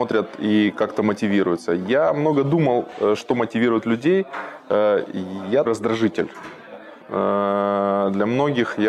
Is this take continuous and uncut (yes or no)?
no